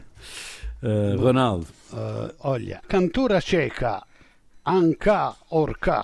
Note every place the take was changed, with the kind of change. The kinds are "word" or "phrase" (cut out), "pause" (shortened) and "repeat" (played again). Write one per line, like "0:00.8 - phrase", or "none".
0:02.8 - word